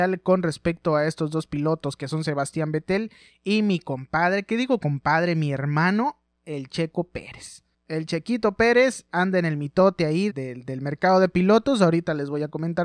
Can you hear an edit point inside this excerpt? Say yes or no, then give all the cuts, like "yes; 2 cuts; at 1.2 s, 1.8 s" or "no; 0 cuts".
yes; 2 cuts; at 9.1 s, 10.3 s